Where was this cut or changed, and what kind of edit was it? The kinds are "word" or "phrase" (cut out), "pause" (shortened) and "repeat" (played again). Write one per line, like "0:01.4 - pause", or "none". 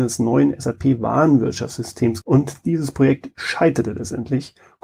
0:02.2 - phrase